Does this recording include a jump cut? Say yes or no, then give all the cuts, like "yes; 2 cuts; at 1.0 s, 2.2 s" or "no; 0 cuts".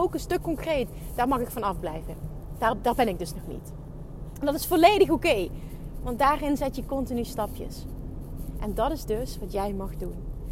no; 0 cuts